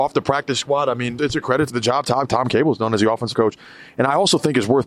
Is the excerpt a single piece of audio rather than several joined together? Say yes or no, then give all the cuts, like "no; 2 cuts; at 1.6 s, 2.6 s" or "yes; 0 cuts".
no; 4 cuts; at 1.2 s, 1.7 s, 2.3 s, 3.3 s